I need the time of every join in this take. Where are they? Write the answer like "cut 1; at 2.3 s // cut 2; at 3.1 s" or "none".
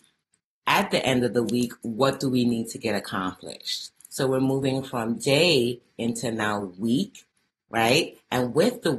none